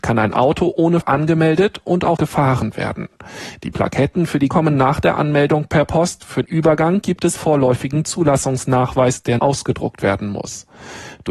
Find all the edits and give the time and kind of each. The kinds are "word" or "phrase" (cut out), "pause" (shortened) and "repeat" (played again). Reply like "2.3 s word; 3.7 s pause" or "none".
1.0 s word; 2.2 s word; 4.5 s word; 6.4 s word; 7.3 s word; 9.4 s word